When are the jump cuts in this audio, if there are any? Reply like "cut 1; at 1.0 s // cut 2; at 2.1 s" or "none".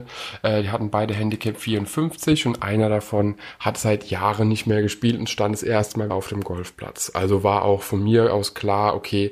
cut 1; at 6.1 s